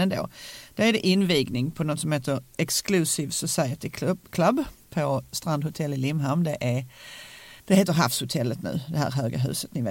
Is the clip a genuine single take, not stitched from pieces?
no; 1 cut; at 7.6 s

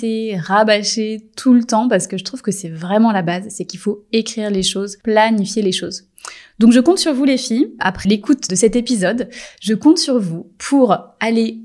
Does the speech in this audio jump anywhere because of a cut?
no; 0 cuts

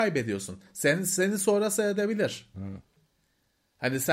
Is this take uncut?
yes; 0 cuts

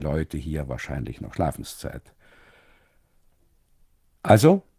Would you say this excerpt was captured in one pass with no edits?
yes; 0 cuts

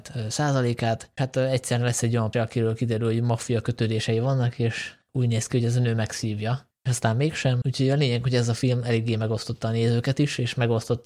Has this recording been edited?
yes; 5 cuts; at 1.2 s, 2.3 s, 5.1 s, 6.8 s, 7.6 s

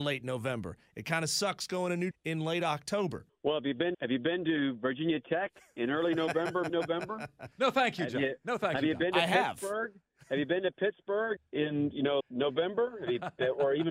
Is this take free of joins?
no; 7 cuts; at 2.1 s, 3.3 s, 3.9 s, 6.7 s, 7.5 s, 11.4 s, 12.2 s

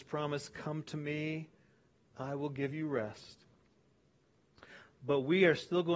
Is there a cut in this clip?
no; 0 cuts

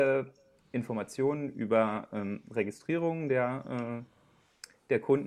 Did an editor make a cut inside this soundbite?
no; 0 cuts

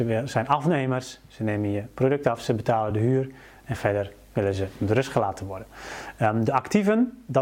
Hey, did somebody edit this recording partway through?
no; 0 cuts

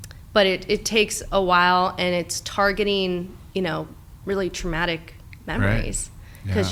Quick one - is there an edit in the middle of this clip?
no; 0 cuts

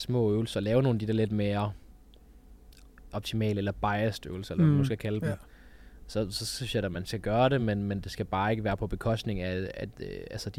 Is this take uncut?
yes; 0 cuts

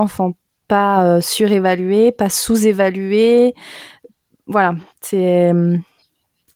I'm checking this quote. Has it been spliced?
no; 0 cuts

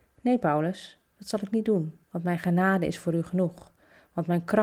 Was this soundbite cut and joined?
yes; 1 cut; at 2.0 s

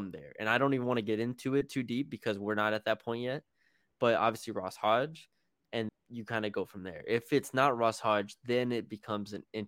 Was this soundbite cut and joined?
yes; 1 cut; at 5.9 s

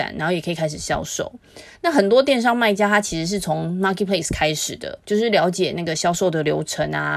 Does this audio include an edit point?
yes; 1 cut; at 5.0 s

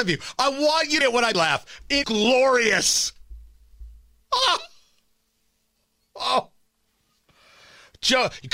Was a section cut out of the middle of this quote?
yes; 3 cuts; at 1.0 s, 1.3 s, 2.0 s

